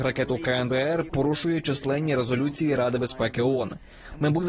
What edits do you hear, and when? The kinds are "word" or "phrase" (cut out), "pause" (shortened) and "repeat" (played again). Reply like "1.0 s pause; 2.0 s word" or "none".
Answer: 1.1 s word